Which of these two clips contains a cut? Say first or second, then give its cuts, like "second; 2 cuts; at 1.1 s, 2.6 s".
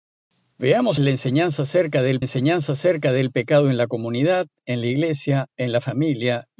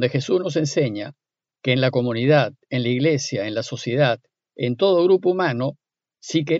first; 2 cuts; at 1.0 s, 2.2 s